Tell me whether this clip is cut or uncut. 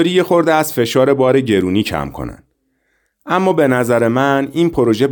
uncut